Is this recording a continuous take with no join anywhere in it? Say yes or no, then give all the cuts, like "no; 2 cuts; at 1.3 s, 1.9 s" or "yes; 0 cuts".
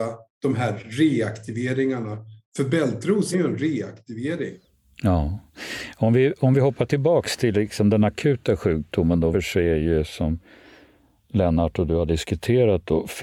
no; 2 cuts; at 3.3 s, 9.3 s